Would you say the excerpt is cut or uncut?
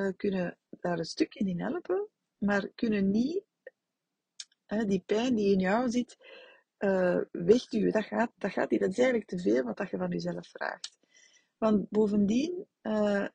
uncut